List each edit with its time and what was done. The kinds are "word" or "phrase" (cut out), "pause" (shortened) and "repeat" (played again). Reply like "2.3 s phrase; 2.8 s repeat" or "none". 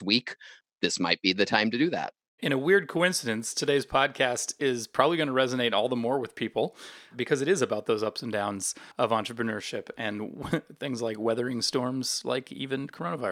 8.9 s pause